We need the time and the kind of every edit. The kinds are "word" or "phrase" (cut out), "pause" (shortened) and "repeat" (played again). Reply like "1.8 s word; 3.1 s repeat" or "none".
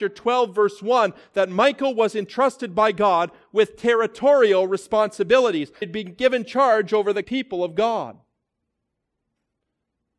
5.8 s phrase; 7.2 s word